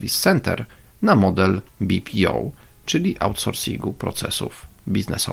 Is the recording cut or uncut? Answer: cut